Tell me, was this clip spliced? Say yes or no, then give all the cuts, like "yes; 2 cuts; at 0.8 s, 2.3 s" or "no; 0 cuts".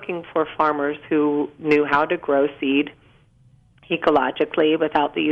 no; 0 cuts